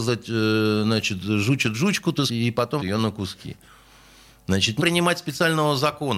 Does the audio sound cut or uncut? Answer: cut